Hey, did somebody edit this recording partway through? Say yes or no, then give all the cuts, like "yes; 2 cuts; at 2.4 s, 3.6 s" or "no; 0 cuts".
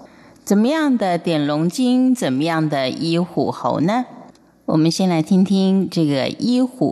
no; 0 cuts